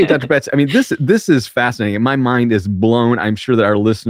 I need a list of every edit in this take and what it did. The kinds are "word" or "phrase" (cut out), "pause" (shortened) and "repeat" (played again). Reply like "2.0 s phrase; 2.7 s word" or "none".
none

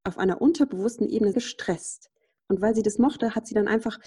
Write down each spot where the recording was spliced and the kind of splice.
1.3 s word; 3.0 s word

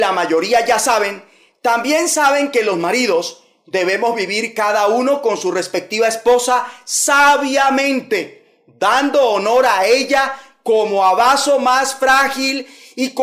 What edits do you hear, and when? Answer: none

